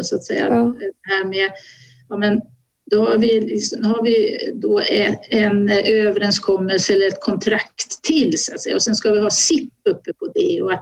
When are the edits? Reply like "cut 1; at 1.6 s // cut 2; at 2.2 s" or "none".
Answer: none